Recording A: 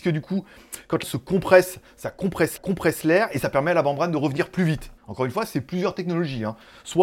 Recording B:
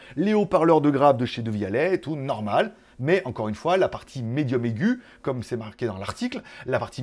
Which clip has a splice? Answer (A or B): A